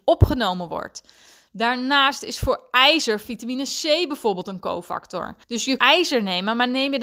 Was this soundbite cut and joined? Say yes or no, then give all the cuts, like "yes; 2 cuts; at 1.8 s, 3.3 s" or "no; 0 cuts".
yes; 2 cuts; at 5.4 s, 5.8 s